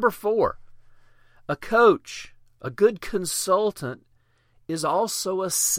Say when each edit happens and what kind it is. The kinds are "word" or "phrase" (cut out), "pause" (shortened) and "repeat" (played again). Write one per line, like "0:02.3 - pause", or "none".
none